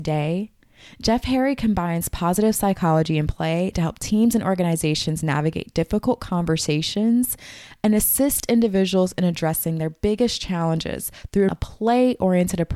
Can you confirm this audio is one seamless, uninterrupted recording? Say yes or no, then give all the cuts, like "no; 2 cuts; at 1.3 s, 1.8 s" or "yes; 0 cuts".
no; 1 cut; at 11.5 s